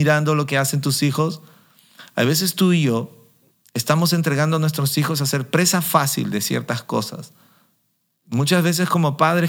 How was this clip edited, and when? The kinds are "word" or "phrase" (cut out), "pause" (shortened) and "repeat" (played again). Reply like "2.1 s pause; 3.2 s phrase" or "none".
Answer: none